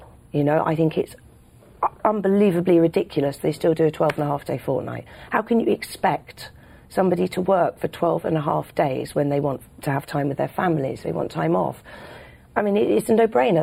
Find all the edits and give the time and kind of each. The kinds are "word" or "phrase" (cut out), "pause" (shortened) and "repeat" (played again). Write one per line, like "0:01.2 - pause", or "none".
none